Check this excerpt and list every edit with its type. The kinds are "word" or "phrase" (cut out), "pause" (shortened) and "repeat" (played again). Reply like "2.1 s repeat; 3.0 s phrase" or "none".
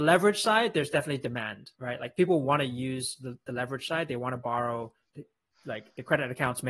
1.8 s pause